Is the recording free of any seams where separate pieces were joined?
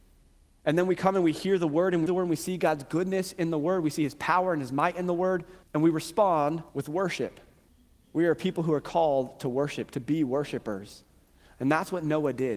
no; 4 cuts; at 2.1 s, 5.6 s, 6.7 s, 7.7 s

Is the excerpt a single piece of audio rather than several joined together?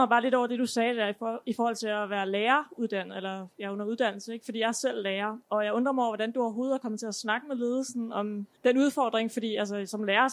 no; 1 cut; at 8.6 s

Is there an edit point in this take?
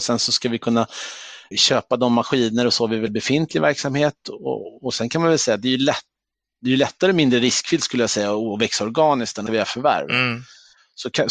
yes; 3 cuts; at 1.5 s, 3.1 s, 9.5 s

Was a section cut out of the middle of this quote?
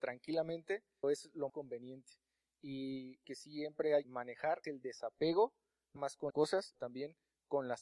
yes; 8 cuts; at 1.0 s, 1.5 s, 3.2 s, 4.0 s, 4.6 s, 6.0 s, 6.3 s, 6.7 s

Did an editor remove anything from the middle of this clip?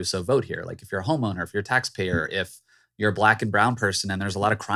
no; 0 cuts

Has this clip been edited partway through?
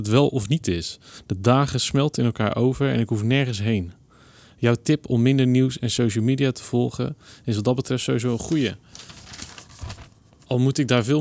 no; 0 cuts

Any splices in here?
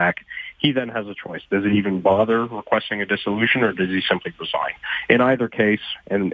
no; 0 cuts

